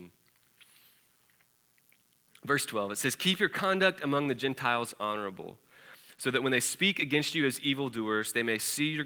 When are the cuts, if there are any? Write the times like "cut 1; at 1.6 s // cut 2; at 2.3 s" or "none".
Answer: none